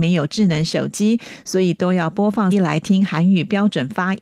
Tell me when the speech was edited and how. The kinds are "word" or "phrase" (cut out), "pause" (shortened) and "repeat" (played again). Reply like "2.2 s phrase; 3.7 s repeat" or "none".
2.5 s word